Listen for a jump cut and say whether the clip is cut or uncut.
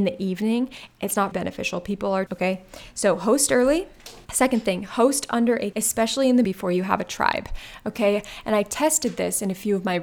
cut